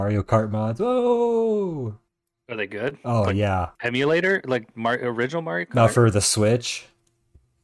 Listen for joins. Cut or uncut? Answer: cut